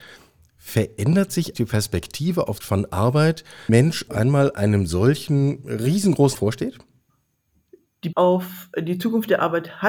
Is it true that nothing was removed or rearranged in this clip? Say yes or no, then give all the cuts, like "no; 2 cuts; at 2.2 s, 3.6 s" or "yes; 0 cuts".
no; 6 cuts; at 1.5 s, 2.6 s, 3.7 s, 4.1 s, 6.3 s, 8.1 s